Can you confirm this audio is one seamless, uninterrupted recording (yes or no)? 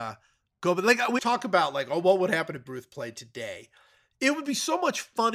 no